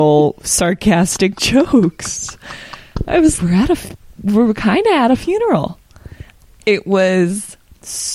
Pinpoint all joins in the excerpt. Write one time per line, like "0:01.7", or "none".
0:03.4